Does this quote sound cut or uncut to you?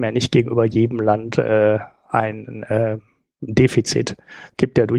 uncut